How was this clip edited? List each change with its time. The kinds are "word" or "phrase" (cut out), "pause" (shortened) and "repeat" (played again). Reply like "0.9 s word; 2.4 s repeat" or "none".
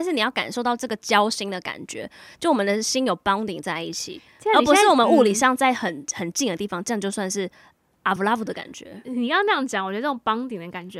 8.2 s word